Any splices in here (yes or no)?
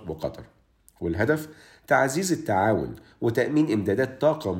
no